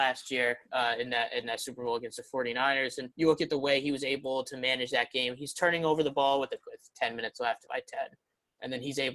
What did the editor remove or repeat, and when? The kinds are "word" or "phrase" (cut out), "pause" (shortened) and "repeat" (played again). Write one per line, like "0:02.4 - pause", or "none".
0:03.1 - pause
0:06.6 - word
0:07.7 - phrase